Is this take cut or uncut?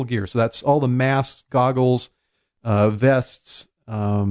uncut